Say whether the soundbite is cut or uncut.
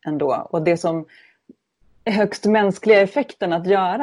uncut